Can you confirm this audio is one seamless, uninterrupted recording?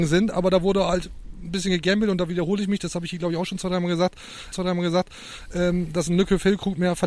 no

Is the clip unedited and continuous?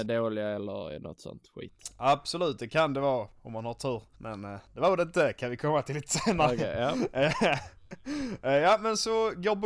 no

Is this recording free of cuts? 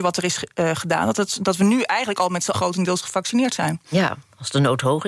no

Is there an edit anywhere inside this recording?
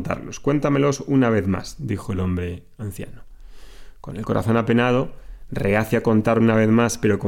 no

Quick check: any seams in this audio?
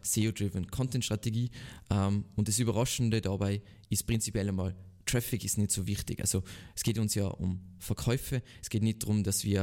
no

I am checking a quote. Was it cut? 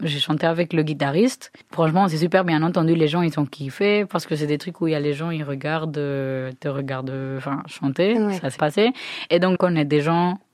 yes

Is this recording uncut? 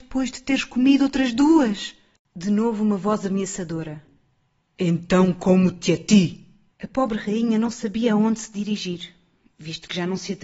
yes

